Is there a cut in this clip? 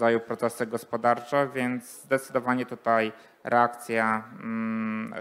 no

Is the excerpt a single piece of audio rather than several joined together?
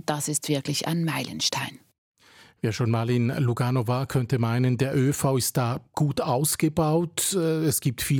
yes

